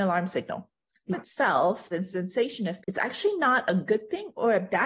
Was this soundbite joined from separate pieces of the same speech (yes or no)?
yes